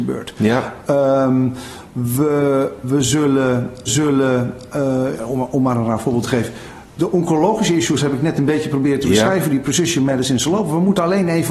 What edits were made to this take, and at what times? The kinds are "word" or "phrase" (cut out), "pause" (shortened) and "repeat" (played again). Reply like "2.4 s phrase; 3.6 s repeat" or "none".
2.8 s word; 3.9 s repeat

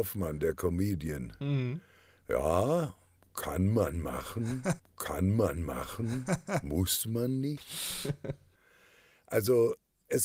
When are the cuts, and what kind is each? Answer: 4.8 s repeat

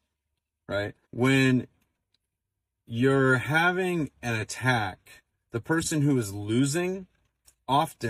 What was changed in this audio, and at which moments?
1.0 s pause

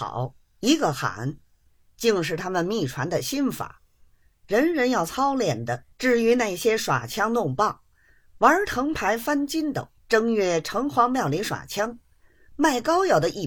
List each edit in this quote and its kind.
5.9 s pause; 10.0 s pause

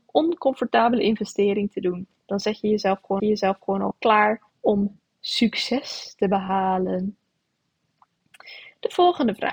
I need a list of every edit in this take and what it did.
3.2 s repeat; 4.5 s pause

